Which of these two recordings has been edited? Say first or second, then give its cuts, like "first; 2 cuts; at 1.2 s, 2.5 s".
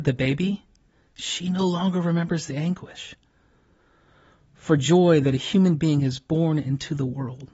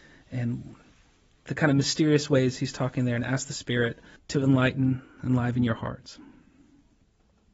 second; 1 cut; at 4.2 s